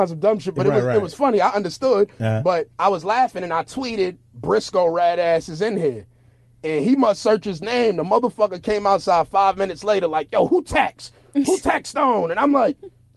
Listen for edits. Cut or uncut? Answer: cut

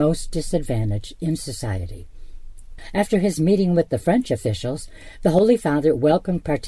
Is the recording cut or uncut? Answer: uncut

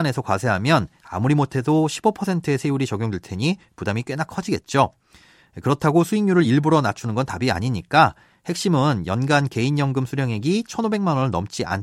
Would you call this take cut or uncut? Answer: uncut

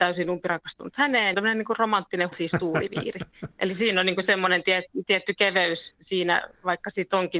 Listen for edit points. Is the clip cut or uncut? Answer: cut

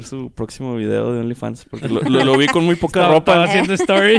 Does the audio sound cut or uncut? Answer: uncut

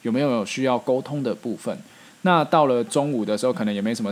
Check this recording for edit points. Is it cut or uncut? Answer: uncut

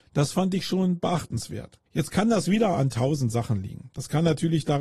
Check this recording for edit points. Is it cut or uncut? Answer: cut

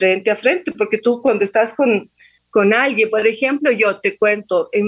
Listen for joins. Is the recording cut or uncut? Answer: uncut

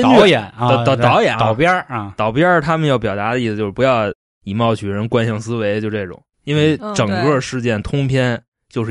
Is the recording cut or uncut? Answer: cut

